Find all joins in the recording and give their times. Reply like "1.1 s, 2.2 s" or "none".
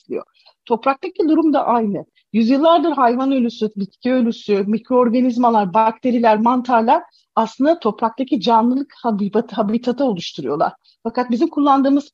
none

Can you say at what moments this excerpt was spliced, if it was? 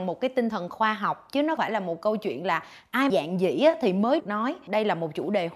1.6 s, 3.1 s, 4.2 s

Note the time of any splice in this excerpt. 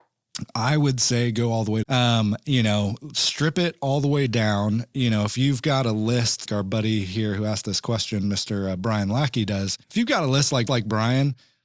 1.8 s, 6.5 s, 9.8 s, 10.7 s

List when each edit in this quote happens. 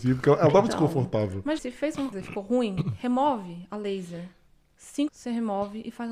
1.6 s, 2.1 s, 5.1 s

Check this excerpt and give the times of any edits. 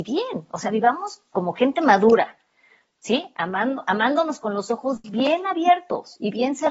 none

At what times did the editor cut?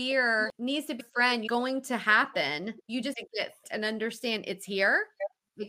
1.0 s, 1.5 s, 2.8 s, 3.1 s, 3.6 s

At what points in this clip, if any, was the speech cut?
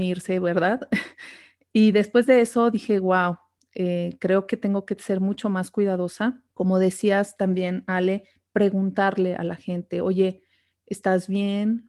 6.5 s

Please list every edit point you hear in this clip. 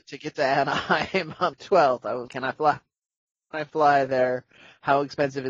1.5 s, 2.3 s

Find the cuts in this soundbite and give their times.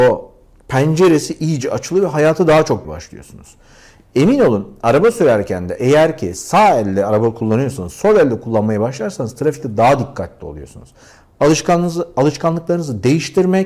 2.8 s

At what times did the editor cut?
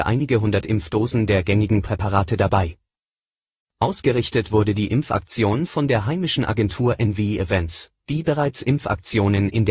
none

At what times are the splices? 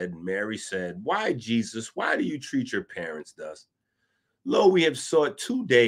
none

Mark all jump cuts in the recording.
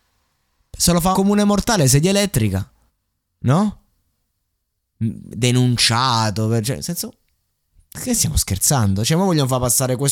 1.1 s, 2.9 s

